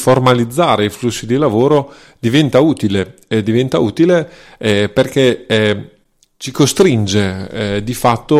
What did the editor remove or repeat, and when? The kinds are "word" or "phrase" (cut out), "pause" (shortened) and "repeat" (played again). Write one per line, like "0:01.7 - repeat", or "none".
none